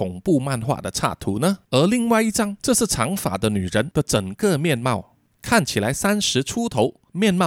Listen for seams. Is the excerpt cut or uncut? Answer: cut